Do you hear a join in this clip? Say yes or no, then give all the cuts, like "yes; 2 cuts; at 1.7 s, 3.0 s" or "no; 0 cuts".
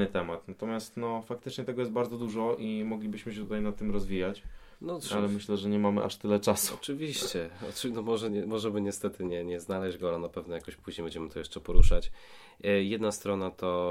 no; 0 cuts